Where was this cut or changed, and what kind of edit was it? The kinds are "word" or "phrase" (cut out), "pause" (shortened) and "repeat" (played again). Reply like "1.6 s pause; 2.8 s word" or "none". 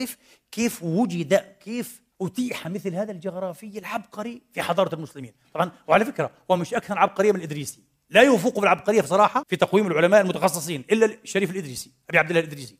2.1 s pause; 9.4 s word